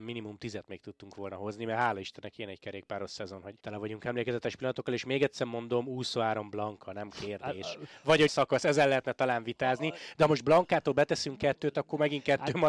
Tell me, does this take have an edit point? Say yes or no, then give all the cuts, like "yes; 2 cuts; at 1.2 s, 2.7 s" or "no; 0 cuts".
yes; 2 cuts; at 3.6 s, 8.3 s